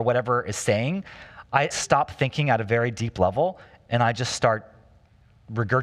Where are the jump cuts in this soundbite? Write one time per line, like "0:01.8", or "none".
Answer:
0:01.7